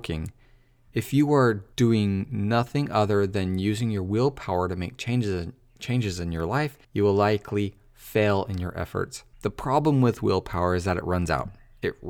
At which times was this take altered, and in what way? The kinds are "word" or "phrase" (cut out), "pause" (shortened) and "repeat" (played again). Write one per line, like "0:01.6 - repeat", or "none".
0:01.7 - pause
0:06.8 - pause
0:09.3 - pause